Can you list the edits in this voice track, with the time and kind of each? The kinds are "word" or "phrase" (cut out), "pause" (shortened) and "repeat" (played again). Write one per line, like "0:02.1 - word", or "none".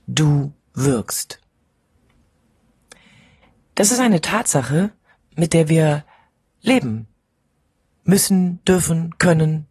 none